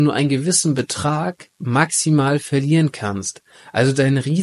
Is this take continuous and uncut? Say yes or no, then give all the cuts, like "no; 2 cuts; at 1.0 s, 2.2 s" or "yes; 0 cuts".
yes; 0 cuts